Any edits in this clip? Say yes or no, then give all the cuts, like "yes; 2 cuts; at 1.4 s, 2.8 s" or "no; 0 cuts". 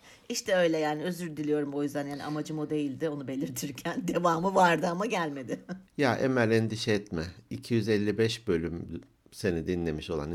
yes; 1 cut; at 5.9 s